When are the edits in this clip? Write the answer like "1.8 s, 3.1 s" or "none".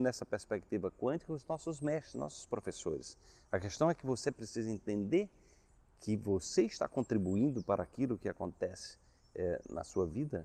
none